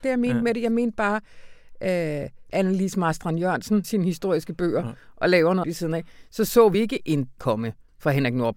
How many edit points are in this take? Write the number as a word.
five